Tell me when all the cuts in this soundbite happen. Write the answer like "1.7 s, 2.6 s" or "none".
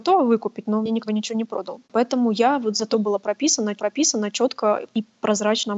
1.1 s, 1.8 s, 2.9 s, 3.8 s